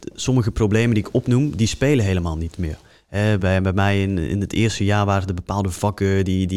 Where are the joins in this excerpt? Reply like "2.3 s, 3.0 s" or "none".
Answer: none